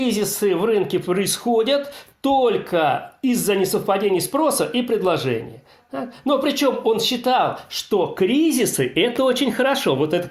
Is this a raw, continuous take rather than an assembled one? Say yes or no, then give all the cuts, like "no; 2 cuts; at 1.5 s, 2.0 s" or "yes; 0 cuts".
yes; 0 cuts